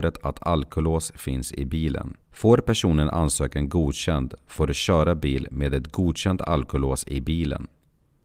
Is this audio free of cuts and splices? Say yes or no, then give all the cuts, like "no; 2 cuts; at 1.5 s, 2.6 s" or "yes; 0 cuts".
no; 1 cut; at 2.2 s